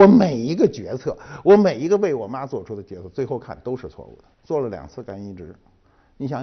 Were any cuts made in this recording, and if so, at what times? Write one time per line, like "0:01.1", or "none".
0:04.3